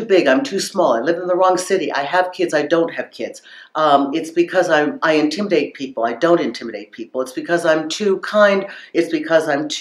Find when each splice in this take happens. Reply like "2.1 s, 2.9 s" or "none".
none